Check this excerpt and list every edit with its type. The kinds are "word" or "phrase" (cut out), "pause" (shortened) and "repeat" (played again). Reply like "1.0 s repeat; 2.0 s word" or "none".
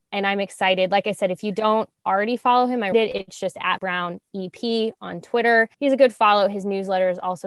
2.9 s word; 3.8 s word; 5.7 s pause